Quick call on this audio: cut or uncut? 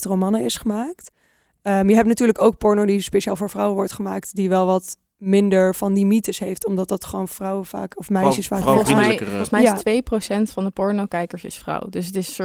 uncut